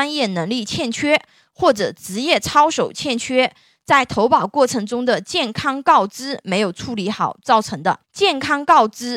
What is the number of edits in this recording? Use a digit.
1